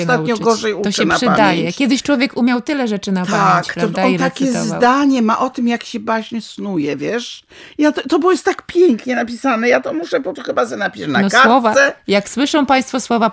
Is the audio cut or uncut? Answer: cut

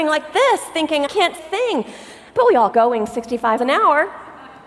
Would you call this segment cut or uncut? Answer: cut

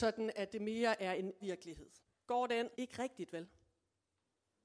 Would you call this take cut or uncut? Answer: cut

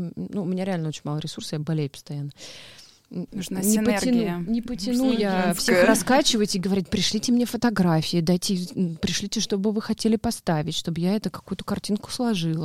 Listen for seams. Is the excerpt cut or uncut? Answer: uncut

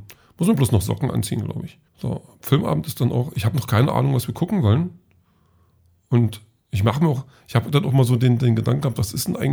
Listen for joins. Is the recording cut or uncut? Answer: cut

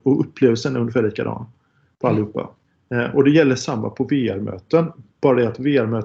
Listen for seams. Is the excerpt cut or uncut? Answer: cut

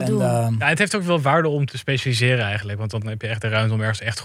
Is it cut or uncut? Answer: cut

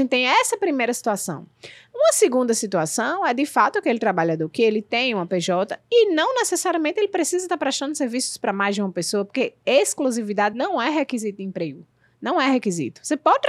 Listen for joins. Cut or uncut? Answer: uncut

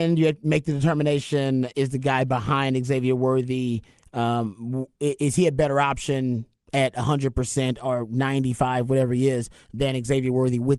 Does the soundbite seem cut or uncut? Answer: uncut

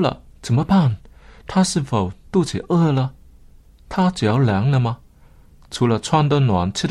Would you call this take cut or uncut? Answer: uncut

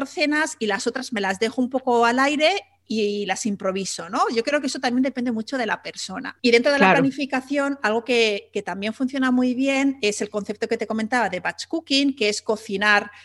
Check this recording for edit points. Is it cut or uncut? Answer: cut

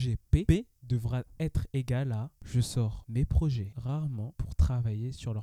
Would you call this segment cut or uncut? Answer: uncut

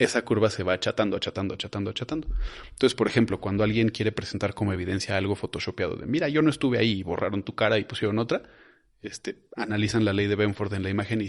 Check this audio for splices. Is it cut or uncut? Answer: uncut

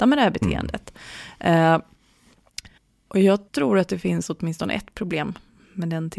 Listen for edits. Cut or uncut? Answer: cut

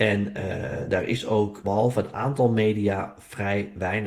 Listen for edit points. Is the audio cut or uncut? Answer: cut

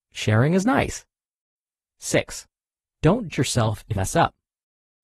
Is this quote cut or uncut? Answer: cut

